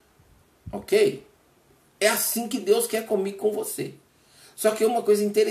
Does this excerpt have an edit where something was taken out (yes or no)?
no